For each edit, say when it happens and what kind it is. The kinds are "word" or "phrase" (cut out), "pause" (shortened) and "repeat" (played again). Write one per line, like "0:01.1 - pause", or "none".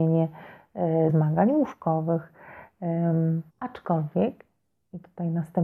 0:01.1 - word
0:03.5 - pause